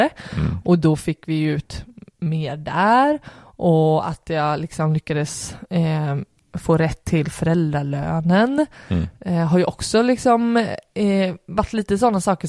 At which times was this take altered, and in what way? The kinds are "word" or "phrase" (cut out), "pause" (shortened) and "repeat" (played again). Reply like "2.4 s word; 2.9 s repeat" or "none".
none

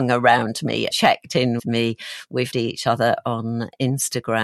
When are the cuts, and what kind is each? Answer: 0.9 s word; 1.6 s word; 2.5 s word

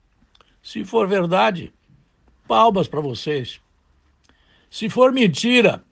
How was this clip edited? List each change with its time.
none

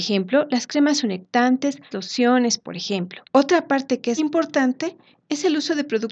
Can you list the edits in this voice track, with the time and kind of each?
1.9 s word; 3.3 s pause; 4.2 s word

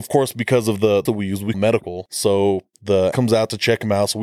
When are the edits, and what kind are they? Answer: 1.1 s word; 1.5 s word; 3.1 s word

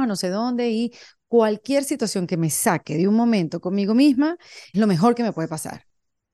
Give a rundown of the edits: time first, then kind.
4.7 s word

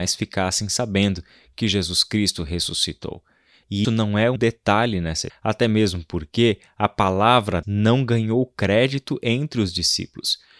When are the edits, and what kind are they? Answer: 3.8 s word; 4.4 s word; 5.3 s word; 7.6 s word

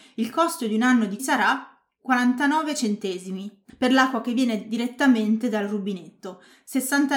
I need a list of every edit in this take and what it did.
1.2 s word; 3.7 s word

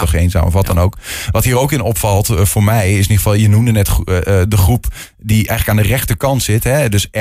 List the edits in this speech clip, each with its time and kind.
none

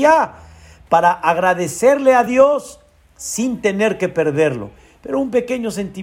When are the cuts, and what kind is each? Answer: none

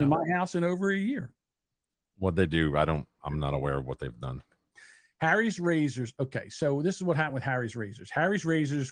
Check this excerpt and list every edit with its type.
none

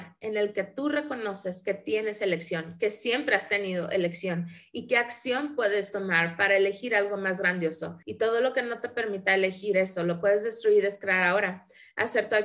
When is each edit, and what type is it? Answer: 8.0 s pause

